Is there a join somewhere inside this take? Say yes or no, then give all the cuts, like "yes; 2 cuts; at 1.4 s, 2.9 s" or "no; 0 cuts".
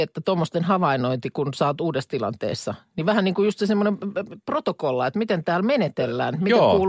no; 0 cuts